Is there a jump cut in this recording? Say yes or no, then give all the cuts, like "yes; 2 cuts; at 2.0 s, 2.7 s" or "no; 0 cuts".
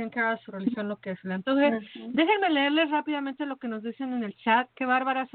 no; 0 cuts